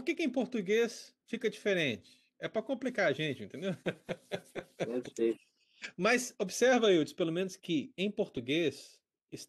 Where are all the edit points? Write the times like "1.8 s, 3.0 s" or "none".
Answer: 3.8 s